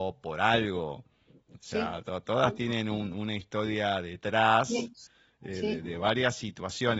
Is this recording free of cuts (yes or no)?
yes